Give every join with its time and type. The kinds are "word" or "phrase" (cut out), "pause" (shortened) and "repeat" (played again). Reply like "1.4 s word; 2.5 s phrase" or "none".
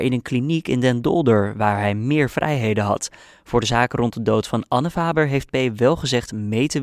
none